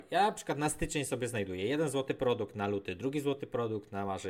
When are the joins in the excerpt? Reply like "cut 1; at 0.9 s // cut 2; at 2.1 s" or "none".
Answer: none